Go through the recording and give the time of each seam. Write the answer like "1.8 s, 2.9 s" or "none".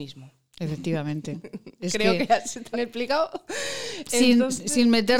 2.7 s